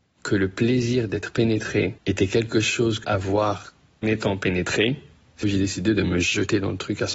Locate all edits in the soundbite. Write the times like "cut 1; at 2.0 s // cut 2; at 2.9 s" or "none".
cut 1; at 2.0 s // cut 2; at 3.0 s // cut 3; at 4.0 s // cut 4; at 5.4 s

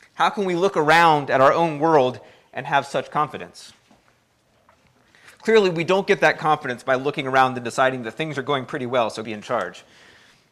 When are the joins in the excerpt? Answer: cut 1; at 9.2 s

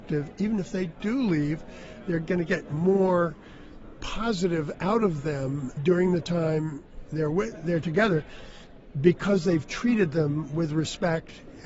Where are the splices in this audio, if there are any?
cut 1; at 5.8 s

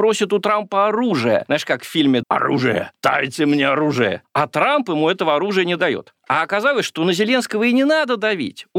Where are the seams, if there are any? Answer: cut 1; at 2.2 s

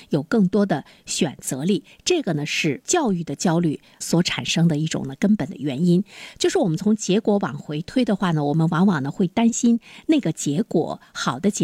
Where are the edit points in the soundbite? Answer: cut 1; at 4.0 s

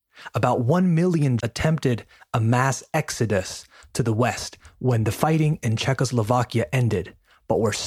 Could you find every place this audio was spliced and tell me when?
cut 1; at 1.4 s

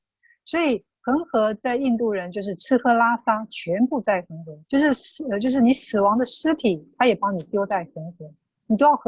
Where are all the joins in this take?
cut 1; at 4.6 s

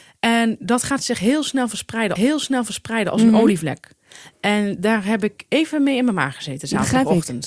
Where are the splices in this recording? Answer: cut 1; at 2.2 s

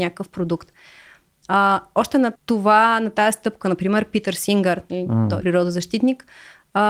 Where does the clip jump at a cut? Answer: cut 1; at 2.4 s // cut 2; at 5.4 s

